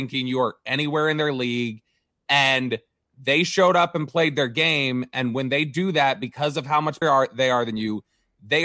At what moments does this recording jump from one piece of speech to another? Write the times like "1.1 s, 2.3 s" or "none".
7.0 s